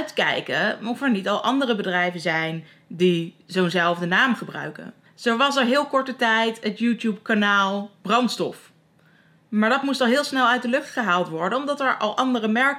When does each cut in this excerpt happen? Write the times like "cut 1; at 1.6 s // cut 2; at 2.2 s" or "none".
cut 1; at 5.1 s